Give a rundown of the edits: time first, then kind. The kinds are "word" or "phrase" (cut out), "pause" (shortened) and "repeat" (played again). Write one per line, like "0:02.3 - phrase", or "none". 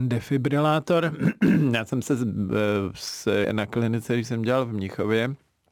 0:03.4 - phrase